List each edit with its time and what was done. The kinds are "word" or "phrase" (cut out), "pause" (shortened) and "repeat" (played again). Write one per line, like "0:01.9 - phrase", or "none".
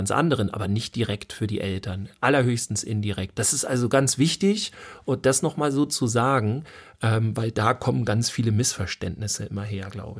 none

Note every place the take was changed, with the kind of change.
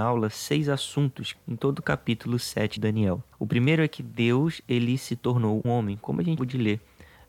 0:01.3 - phrase
0:02.8 - word
0:03.3 - pause
0:05.6 - word
0:06.4 - word

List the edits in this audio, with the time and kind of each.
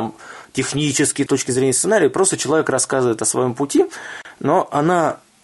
0:01.3 - phrase

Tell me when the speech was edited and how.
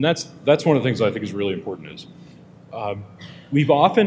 none

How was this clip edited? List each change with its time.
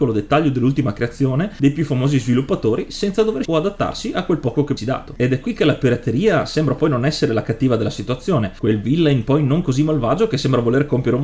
0:03.4 - phrase
0:04.8 - phrase

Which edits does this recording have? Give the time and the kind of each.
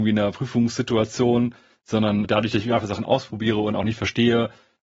0:02.2 - word

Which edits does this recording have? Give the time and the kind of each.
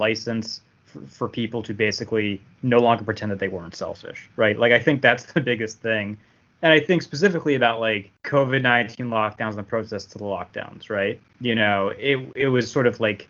none

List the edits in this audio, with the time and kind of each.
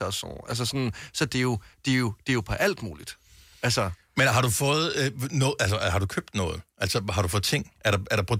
none

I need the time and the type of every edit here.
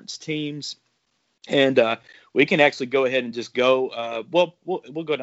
none

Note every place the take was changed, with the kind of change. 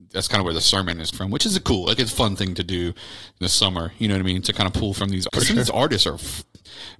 0:01.1 - word
0:02.0 - word
0:03.4 - word
0:05.3 - word

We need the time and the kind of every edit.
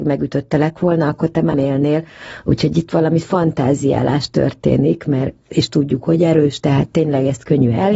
0:01.5 - word

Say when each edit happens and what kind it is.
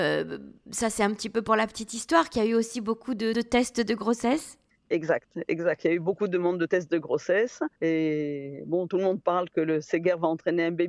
0:03.3 - word
0:04.7 - pause
0:07.8 - pause

